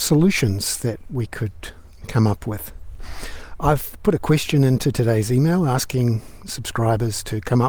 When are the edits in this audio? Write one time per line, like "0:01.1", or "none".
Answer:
none